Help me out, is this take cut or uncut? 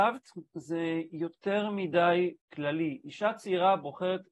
cut